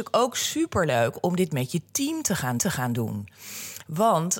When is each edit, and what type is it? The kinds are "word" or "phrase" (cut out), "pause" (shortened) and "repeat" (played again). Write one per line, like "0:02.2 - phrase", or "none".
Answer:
0:02.6 - repeat